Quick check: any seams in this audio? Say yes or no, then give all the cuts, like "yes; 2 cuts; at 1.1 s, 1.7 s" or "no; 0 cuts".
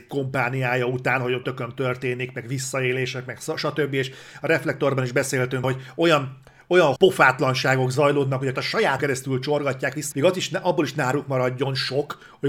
yes; 6 cuts; at 1.4 s, 5.6 s, 7.0 s, 8.5 s, 9.0 s, 10.1 s